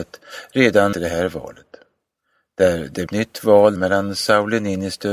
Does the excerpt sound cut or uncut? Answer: cut